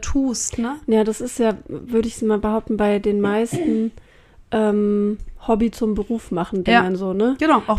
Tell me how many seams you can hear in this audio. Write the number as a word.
zero